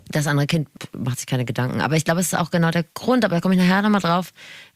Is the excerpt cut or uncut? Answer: cut